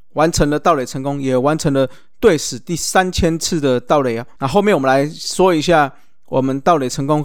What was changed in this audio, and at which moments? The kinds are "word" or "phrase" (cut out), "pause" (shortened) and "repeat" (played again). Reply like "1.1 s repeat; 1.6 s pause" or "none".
4.3 s pause